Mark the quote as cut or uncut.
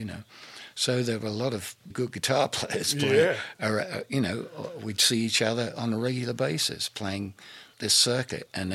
cut